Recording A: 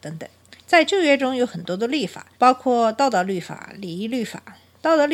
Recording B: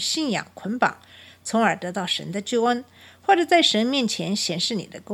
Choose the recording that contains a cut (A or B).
A